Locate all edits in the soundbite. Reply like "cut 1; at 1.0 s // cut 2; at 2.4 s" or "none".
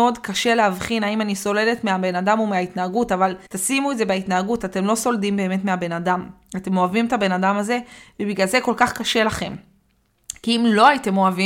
cut 1; at 3.5 s